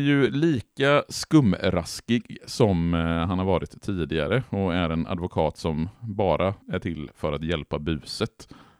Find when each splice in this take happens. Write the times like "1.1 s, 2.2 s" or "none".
6.6 s